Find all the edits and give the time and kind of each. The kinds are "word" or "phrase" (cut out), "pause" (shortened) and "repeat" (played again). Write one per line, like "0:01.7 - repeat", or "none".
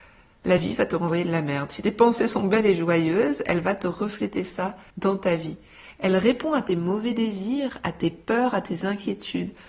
0:04.9 - pause